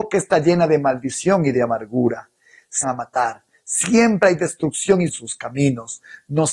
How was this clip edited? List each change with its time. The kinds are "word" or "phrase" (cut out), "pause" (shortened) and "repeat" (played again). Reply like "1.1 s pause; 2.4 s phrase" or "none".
2.8 s word; 5.1 s phrase